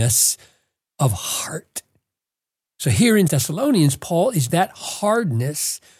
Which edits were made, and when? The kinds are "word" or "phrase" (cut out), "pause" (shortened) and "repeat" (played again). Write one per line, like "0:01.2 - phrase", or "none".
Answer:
0:03.3 - word
0:04.5 - word